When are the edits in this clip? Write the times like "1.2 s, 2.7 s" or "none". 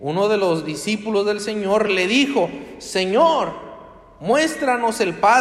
none